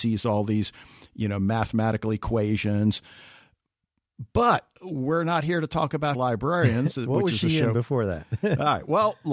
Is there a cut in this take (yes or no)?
yes